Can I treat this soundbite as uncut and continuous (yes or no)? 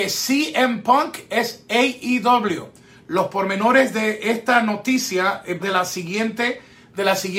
no